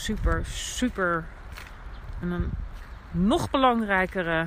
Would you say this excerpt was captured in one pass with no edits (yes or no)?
no